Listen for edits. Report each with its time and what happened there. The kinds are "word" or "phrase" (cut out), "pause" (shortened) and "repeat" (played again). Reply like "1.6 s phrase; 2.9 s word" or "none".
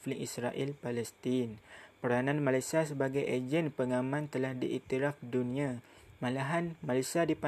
none